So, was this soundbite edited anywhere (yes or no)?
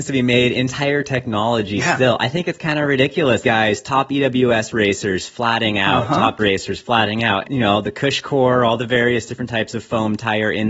yes